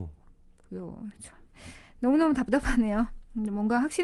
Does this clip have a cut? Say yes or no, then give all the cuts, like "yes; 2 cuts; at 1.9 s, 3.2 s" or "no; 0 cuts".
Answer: no; 0 cuts